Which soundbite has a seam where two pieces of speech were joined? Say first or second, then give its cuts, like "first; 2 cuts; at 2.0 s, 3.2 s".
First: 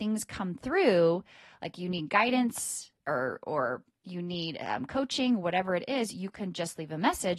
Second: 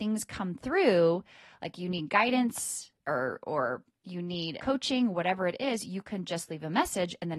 second; 1 cut; at 4.6 s